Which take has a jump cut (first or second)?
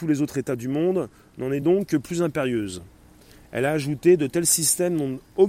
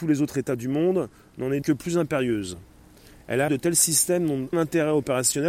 second